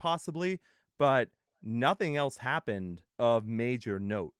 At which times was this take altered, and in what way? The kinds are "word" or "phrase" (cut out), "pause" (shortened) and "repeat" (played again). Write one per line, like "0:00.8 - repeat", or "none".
0:03.1 - pause